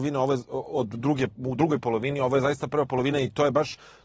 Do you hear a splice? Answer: no; 0 cuts

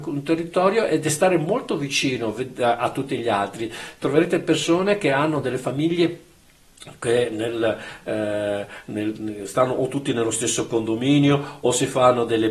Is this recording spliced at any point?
no; 0 cuts

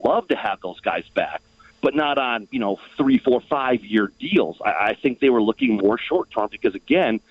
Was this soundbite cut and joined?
no; 0 cuts

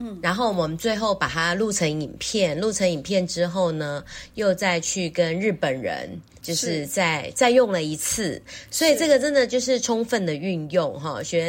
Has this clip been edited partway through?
yes; 1 cut; at 6.4 s

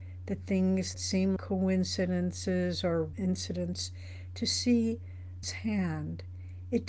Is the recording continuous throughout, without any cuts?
no; 4 cuts; at 0.9 s, 1.4 s, 3.1 s, 5.4 s

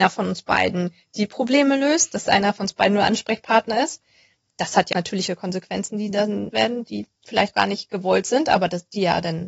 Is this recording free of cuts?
no; 3 cuts; at 4.9 s, 6.5 s, 7.5 s

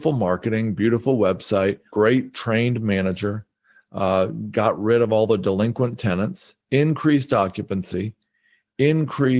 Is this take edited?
yes; 2 cuts; at 1.9 s, 6.6 s

